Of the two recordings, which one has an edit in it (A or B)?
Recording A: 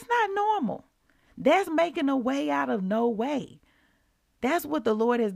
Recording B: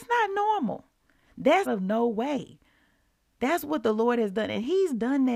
B